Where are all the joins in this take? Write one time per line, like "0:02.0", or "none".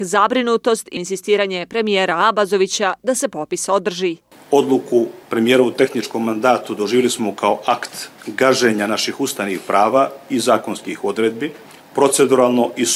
0:01.0
0:05.2
0:08.1
0:11.8